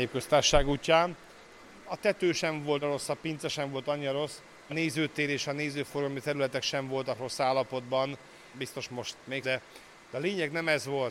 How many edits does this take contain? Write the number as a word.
four